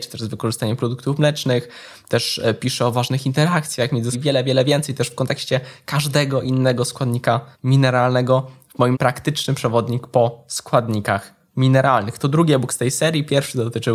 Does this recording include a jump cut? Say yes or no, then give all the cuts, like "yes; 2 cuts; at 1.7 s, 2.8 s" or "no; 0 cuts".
yes; 3 cuts; at 4.1 s, 7.5 s, 8.9 s